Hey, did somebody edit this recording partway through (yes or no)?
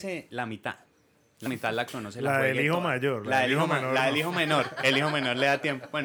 yes